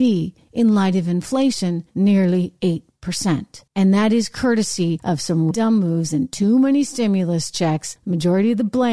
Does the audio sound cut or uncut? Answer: cut